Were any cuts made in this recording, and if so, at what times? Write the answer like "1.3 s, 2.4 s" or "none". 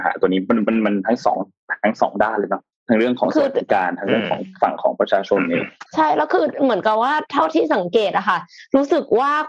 2.7 s, 5.9 s